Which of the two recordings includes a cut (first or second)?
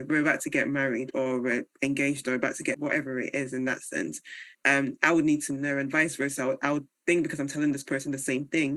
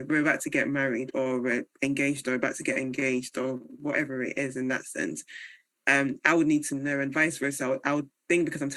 first